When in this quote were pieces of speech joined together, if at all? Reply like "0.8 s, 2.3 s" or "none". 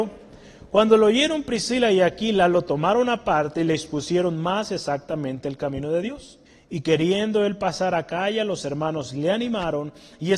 6.5 s